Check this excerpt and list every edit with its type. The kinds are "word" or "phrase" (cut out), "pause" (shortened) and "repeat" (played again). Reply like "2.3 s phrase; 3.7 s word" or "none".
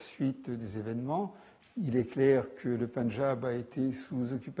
none